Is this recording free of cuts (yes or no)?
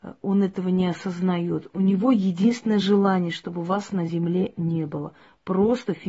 yes